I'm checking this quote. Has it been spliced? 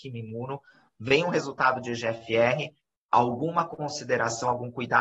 no; 0 cuts

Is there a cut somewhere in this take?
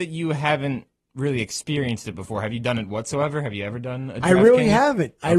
no; 0 cuts

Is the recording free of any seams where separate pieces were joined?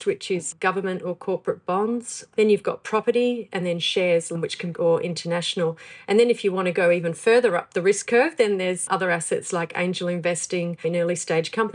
no; 1 cut; at 4.7 s

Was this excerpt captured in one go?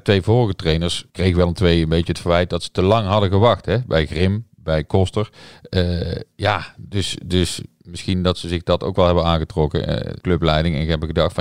no; 2 cuts; at 1.1 s, 10.2 s

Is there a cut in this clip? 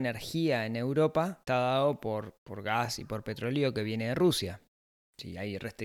yes; 2 cuts; at 1.5 s, 2.4 s

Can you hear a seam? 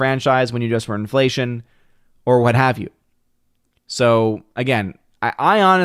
no; 0 cuts

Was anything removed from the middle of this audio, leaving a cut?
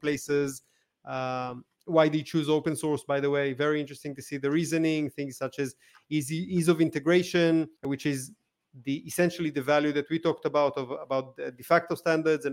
yes; 1 cut; at 7.8 s

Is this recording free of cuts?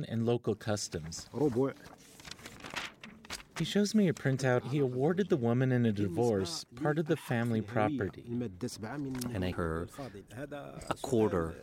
no; 2 cuts; at 4.6 s, 9.5 s

